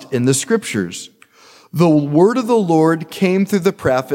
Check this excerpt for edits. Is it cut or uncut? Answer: uncut